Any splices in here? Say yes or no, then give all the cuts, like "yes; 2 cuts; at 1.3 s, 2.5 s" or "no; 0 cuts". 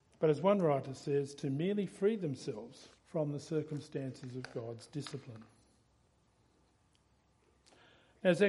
yes; 1 cut; at 3.0 s